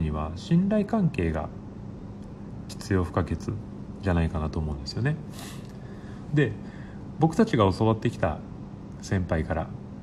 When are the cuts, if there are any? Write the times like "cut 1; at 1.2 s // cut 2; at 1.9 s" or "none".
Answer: cut 1; at 2.7 s